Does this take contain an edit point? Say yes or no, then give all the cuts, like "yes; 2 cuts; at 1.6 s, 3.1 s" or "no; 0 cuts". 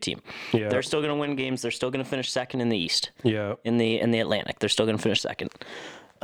no; 0 cuts